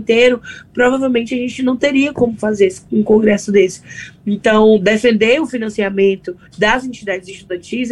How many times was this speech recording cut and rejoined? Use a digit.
1